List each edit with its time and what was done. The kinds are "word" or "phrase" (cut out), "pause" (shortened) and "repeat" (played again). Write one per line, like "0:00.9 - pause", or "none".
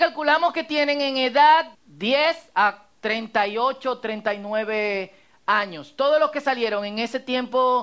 0:01.7 - word